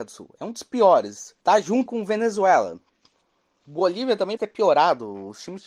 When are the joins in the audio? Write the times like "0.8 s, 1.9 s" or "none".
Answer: 1.4 s, 1.9 s, 3.6 s, 4.4 s